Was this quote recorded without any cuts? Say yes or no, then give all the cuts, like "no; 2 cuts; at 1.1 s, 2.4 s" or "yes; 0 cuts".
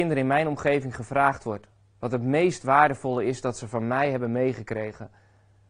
yes; 0 cuts